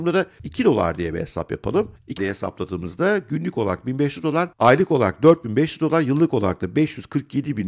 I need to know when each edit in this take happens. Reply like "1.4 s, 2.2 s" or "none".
2.2 s, 4.5 s